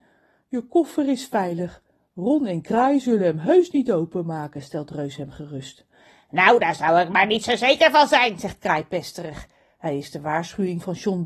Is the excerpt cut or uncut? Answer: uncut